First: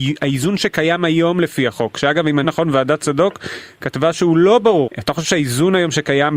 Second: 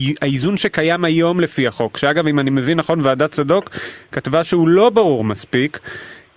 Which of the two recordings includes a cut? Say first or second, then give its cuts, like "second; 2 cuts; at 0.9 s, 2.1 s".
first; 2 cuts; at 2.4 s, 4.9 s